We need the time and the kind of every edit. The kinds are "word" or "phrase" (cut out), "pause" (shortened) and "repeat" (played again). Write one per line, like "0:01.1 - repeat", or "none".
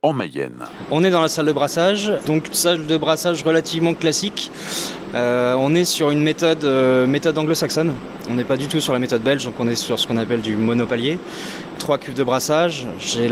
none